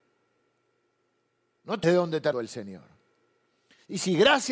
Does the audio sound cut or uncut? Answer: cut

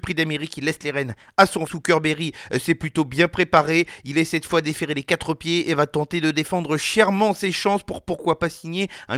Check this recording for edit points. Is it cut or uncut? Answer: cut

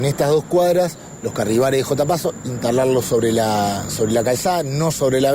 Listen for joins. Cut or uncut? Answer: uncut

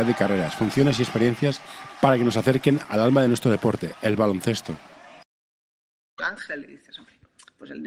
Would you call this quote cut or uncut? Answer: uncut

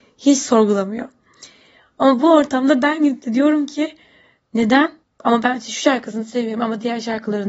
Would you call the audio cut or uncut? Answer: cut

